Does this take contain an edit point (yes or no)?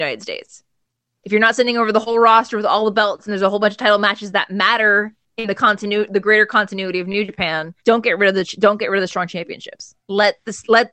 yes